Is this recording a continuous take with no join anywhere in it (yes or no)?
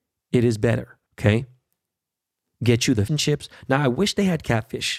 no